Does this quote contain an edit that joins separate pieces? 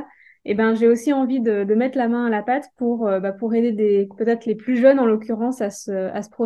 no; 0 cuts

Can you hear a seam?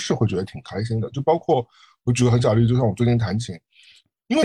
no; 0 cuts

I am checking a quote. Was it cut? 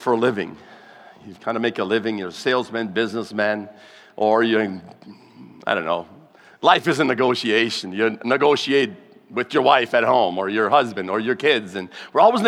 no; 0 cuts

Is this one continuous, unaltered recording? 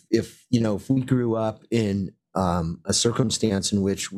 yes; 0 cuts

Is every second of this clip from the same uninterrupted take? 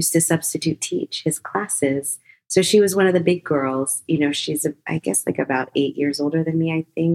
yes; 0 cuts

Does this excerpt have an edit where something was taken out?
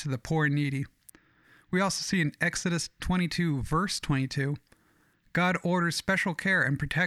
no; 0 cuts

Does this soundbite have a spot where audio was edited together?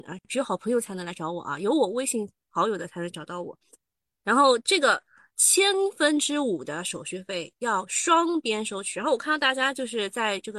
no; 0 cuts

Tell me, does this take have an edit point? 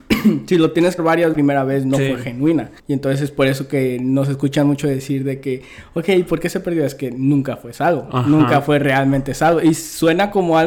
yes; 3 cuts; at 1.0 s, 1.3 s, 2.8 s

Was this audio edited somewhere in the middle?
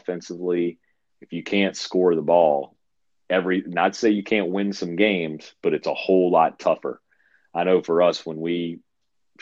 no; 0 cuts

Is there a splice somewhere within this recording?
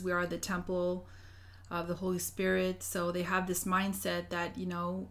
no; 0 cuts

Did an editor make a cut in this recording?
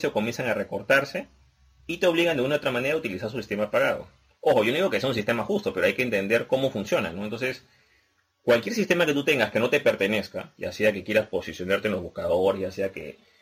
no; 0 cuts

